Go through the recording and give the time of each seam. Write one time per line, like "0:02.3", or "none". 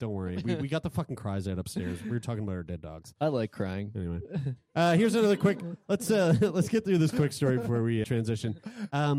0:08.0

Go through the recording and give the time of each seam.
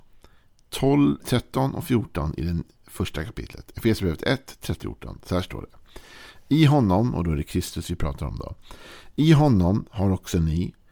0:01.2
0:04.8

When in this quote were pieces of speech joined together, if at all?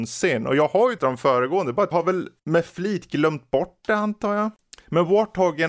0:01.0
0:01.9
0:02.4

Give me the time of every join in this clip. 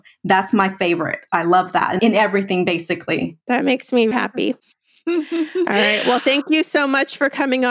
0:02.0
0:03.4
0:04.1
0:04.6

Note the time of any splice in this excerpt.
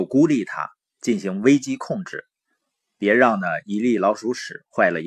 none

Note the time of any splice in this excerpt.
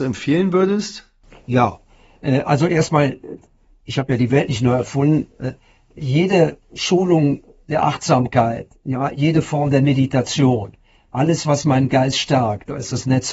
none

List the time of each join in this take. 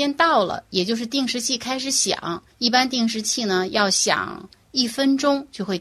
0:02.5

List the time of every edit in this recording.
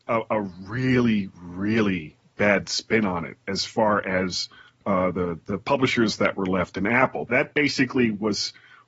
none

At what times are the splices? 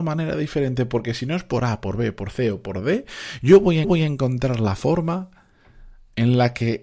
0:03.8

